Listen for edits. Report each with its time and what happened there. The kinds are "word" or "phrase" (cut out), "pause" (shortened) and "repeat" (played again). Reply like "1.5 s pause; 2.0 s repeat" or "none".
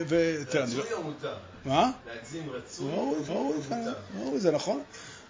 2.0 s pause; 3.3 s repeat